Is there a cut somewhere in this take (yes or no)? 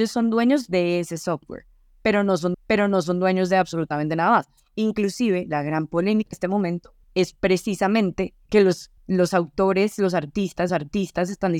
yes